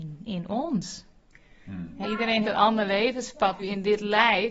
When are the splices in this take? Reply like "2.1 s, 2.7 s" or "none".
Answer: 2.0 s, 2.4 s, 3.6 s